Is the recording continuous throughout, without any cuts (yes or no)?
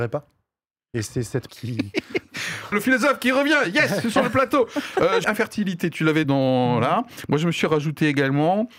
no